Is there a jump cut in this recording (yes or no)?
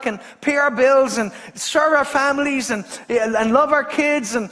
no